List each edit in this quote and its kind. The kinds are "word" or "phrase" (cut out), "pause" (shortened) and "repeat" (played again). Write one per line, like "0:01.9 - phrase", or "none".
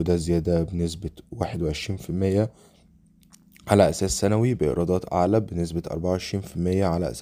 none